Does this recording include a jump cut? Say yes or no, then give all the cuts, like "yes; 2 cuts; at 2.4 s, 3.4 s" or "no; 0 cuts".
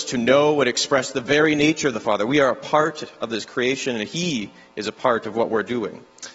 no; 0 cuts